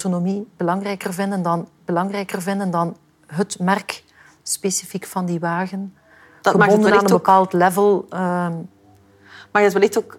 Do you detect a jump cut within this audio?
yes; 1 cut; at 1.8 s

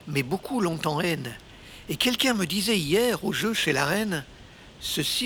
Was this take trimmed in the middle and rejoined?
no; 0 cuts

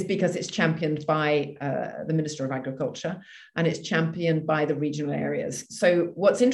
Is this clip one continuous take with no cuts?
yes; 0 cuts

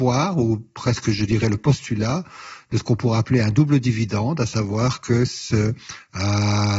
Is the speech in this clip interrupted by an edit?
no; 0 cuts

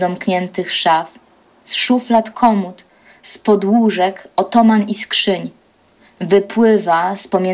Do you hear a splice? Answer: no; 0 cuts

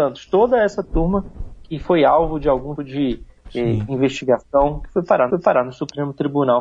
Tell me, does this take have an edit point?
yes; 2 cuts; at 2.8 s, 5.3 s

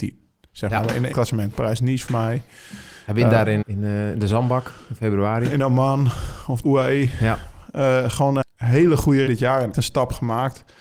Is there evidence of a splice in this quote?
yes; 7 cuts; at 1.1 s, 2.1 s, 3.6 s, 6.6 s, 8.4 s, 9.3 s, 9.7 s

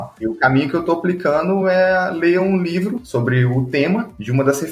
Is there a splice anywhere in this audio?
no; 0 cuts

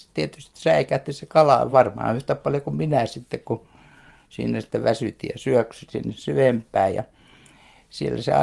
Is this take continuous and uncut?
yes; 0 cuts

